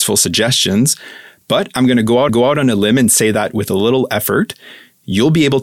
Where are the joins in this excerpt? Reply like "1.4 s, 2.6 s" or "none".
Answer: 2.3 s